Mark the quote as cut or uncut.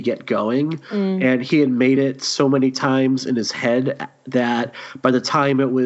uncut